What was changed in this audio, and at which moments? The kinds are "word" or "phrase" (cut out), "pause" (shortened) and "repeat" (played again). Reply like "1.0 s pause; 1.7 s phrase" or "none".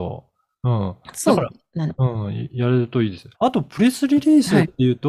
3.3 s pause